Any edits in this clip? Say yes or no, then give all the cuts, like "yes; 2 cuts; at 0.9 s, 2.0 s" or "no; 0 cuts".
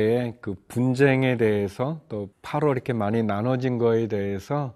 yes; 1 cut; at 2.3 s